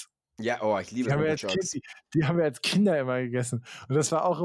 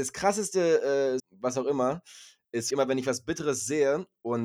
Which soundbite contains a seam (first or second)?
second